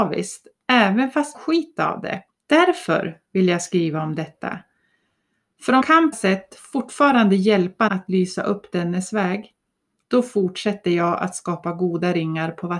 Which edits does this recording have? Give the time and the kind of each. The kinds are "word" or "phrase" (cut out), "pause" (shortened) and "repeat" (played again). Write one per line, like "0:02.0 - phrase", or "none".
0:01.3 - phrase
0:02.3 - pause
0:05.8 - word
0:06.1 - phrase
0:07.9 - word